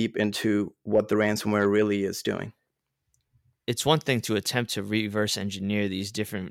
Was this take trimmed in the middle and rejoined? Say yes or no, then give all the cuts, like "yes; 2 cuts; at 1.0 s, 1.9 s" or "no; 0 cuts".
no; 0 cuts